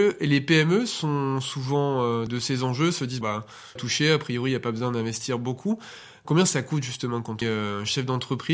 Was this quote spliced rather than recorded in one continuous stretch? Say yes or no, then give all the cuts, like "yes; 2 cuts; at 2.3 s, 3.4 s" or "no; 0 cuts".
yes; 4 cuts; at 2.3 s, 3.2 s, 3.8 s, 7.4 s